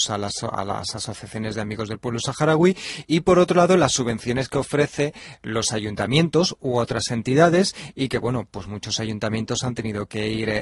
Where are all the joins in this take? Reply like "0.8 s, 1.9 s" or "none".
none